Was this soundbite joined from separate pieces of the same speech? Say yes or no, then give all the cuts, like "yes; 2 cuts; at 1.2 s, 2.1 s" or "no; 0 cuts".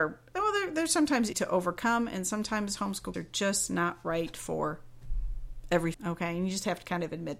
yes; 3 cuts; at 1.3 s, 3.1 s, 5.9 s